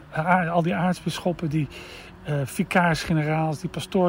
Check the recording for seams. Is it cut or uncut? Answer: uncut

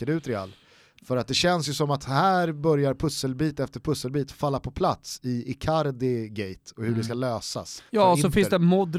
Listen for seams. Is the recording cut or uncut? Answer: cut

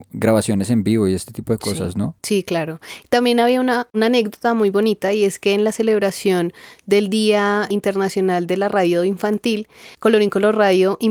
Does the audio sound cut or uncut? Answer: cut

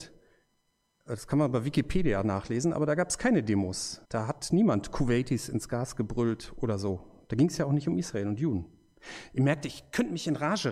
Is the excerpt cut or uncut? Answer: cut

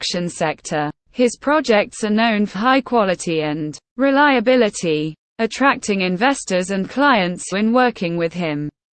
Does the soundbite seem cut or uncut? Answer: cut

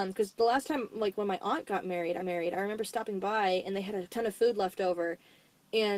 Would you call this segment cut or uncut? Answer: cut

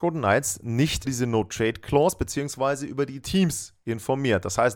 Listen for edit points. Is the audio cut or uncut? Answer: cut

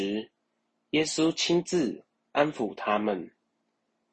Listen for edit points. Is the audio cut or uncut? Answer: uncut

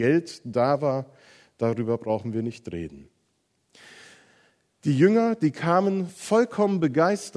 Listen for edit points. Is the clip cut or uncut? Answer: uncut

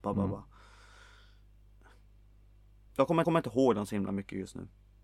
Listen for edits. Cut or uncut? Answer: cut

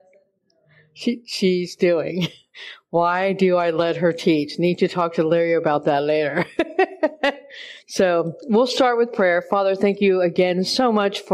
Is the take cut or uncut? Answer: cut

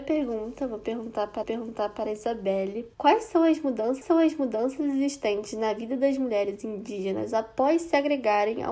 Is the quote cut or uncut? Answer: cut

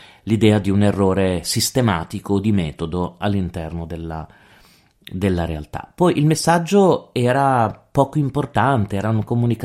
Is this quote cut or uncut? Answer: uncut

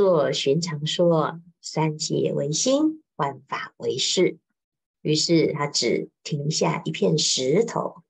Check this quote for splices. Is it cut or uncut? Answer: uncut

